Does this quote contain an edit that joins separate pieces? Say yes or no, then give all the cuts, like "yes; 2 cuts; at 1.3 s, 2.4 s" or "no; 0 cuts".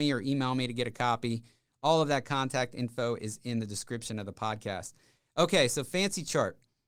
no; 0 cuts